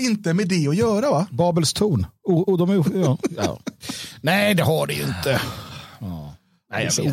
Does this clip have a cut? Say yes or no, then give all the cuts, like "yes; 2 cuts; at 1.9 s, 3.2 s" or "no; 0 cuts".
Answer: no; 0 cuts